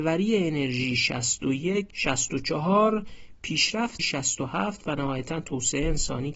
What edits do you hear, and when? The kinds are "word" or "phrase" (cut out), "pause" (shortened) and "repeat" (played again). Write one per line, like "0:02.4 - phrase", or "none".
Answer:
0:01.9 - word
0:04.0 - word

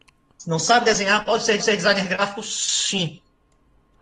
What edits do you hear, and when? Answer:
0:01.6 - repeat

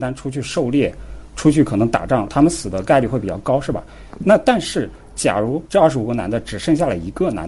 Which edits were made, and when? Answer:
0:05.6 - pause

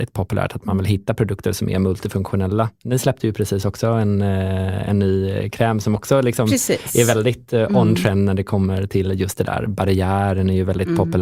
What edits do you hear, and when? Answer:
none

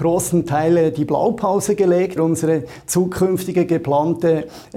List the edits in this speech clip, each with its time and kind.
0:02.2 - word

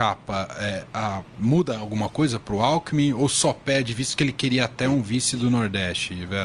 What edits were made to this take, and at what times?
none

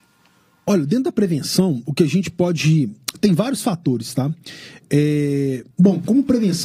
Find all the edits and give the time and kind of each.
0:05.7 - pause

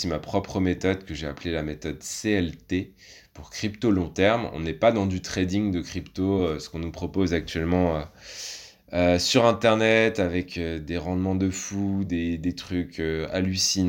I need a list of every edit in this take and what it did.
none

